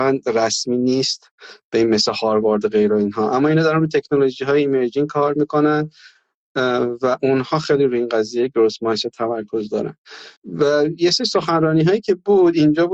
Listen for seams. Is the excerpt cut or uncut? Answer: cut